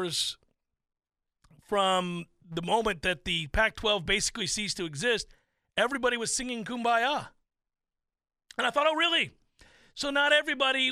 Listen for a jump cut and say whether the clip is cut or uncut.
uncut